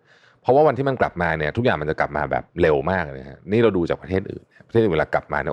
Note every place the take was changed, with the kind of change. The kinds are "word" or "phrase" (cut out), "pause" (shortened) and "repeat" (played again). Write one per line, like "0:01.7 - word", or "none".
0:02.5 - pause